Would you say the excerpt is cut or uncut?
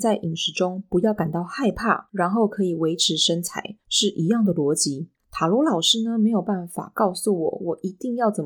cut